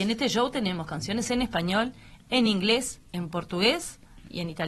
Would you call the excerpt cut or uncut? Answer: uncut